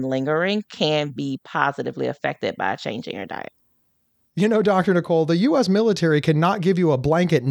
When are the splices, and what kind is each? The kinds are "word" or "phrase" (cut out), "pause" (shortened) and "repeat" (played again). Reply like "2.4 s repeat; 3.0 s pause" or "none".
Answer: none